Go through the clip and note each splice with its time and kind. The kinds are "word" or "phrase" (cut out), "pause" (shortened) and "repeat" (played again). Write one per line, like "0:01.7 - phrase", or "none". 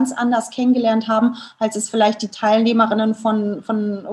none